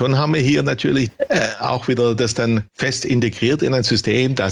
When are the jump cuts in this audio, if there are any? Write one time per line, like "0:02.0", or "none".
0:01.1
0:02.7